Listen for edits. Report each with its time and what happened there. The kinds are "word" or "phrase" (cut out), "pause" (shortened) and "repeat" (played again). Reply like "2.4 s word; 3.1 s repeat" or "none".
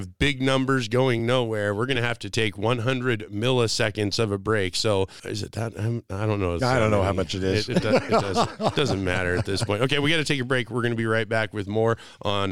none